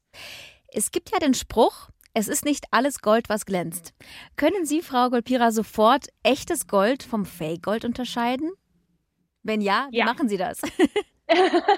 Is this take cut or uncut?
uncut